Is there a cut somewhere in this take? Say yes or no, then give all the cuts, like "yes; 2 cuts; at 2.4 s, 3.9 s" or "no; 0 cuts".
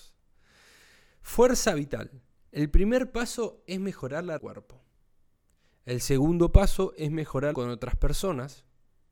yes; 2 cuts; at 4.4 s, 7.5 s